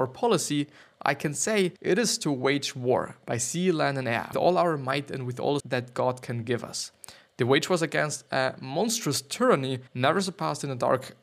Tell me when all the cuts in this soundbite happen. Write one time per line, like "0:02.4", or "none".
0:01.8
0:04.3
0:05.6
0:09.9